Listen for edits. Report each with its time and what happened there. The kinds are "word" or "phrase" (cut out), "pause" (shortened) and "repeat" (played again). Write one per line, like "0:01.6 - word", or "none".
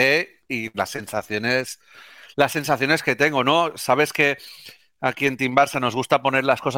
none